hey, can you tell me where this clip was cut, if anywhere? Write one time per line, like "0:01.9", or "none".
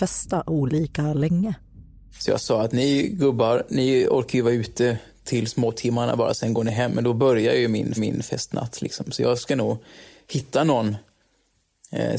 0:08.0